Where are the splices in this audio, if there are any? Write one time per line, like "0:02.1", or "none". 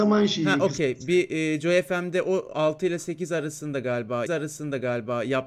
0:04.3